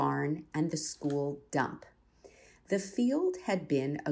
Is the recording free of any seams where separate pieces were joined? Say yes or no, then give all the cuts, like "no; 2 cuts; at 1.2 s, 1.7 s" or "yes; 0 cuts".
yes; 0 cuts